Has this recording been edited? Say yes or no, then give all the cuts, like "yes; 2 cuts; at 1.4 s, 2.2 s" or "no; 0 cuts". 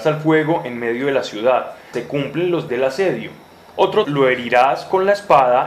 yes; 3 cuts; at 1.9 s, 2.7 s, 4.0 s